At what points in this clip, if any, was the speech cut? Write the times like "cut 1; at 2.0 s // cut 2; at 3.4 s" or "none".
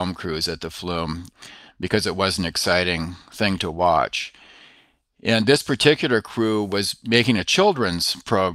none